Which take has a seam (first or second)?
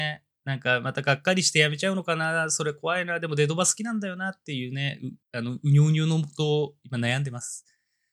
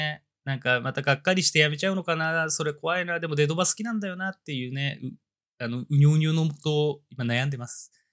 first